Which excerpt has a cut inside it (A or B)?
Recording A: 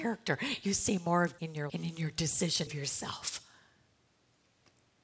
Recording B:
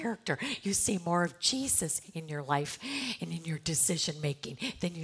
A